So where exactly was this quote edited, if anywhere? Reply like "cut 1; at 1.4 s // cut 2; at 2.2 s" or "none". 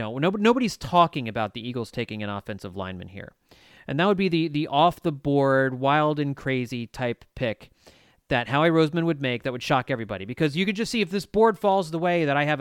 none